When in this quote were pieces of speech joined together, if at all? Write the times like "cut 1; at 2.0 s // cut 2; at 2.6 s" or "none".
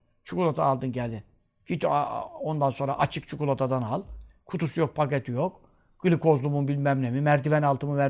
none